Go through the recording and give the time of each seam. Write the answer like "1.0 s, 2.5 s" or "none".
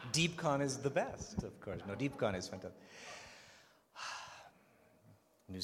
none